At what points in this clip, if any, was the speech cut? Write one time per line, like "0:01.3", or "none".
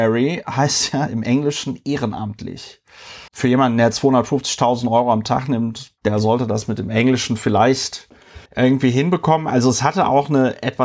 0:03.3
0:06.0
0:08.5